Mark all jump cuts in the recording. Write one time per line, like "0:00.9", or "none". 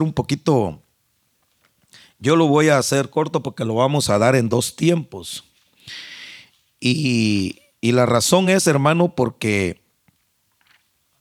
none